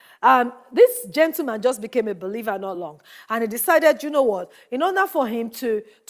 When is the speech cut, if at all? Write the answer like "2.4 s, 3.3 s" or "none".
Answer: none